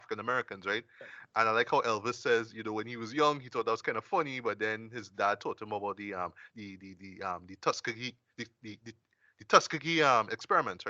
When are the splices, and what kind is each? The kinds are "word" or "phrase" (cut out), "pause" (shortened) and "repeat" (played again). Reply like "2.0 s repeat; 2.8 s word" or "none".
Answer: 6.5 s word